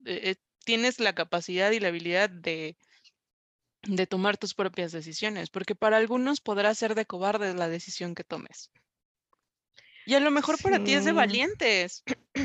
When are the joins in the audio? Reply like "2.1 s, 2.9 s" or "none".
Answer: none